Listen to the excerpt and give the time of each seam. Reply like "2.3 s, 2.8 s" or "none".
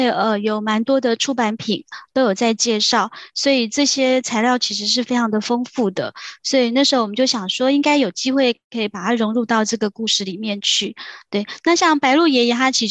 none